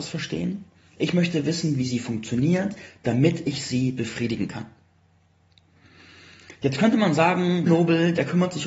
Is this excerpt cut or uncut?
cut